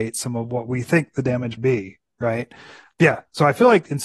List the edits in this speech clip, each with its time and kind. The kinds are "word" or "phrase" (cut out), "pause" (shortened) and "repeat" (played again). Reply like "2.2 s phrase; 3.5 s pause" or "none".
1.6 s word